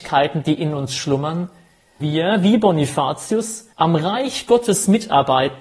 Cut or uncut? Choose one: cut